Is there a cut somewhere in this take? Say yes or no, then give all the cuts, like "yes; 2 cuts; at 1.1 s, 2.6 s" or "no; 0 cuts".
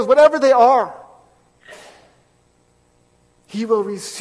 no; 0 cuts